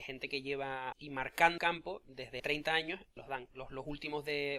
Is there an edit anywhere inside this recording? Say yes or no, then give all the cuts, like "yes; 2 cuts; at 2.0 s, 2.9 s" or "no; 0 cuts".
yes; 4 cuts; at 0.9 s, 1.6 s, 2.4 s, 3.2 s